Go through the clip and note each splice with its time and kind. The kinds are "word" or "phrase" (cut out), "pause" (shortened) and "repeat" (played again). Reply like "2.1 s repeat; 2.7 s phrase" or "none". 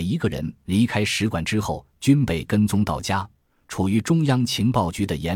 none